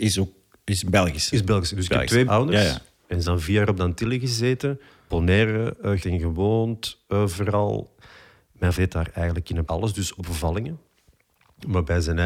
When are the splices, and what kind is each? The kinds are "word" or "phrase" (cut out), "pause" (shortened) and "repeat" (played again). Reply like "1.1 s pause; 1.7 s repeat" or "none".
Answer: 2.3 s word; 3.2 s word; 5.1 s word; 6.0 s word; 8.7 s word; 9.6 s word; 10.2 s word